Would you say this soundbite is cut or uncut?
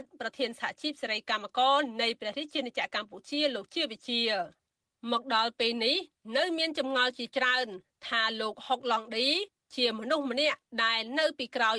uncut